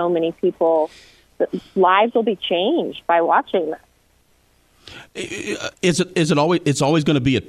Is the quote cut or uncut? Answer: cut